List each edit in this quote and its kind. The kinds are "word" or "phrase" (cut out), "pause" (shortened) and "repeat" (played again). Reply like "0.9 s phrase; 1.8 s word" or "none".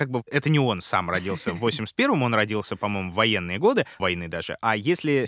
4.0 s word